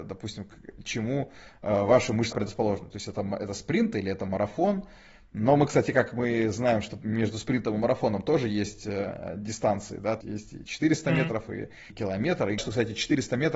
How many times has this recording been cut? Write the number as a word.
four